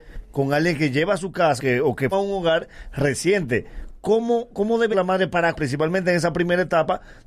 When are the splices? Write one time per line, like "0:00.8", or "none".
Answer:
0:01.6
0:02.1
0:04.9
0:05.5